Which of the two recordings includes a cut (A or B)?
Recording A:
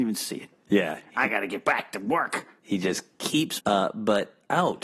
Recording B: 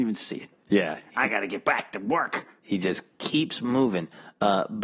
A